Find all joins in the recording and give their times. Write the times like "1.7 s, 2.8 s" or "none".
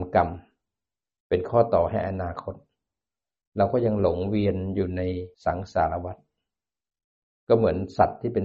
5.3 s